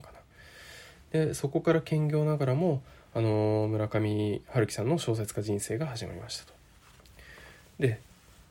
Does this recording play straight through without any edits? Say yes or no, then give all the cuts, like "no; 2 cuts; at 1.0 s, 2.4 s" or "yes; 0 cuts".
yes; 0 cuts